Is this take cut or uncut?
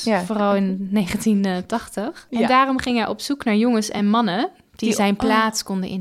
uncut